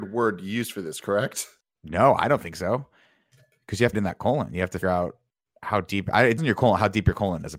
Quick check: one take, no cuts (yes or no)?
no